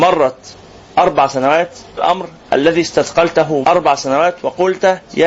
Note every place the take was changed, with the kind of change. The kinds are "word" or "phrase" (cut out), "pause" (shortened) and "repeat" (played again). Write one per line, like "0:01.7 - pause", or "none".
0:02.0 - word
0:03.6 - word